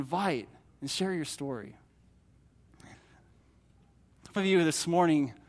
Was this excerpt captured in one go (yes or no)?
no